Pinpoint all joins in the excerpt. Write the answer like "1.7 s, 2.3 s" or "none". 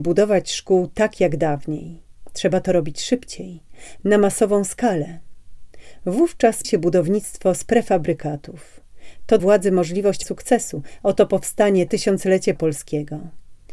6.6 s, 9.4 s, 10.2 s, 11.9 s, 12.6 s